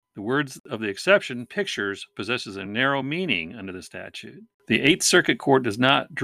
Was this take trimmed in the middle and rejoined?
no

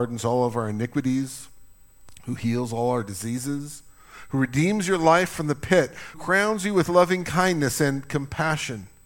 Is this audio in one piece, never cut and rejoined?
no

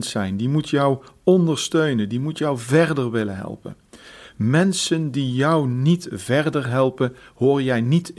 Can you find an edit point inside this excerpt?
no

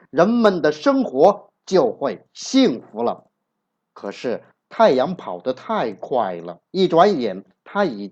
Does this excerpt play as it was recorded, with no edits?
no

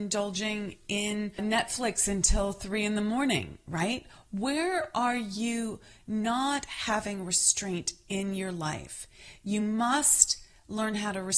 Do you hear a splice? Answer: no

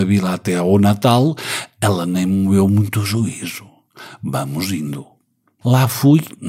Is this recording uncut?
yes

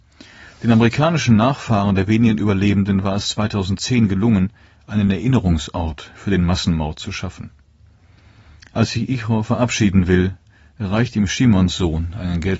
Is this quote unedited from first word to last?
yes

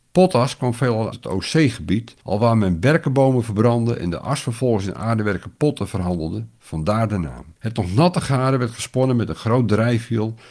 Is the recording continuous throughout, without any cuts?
no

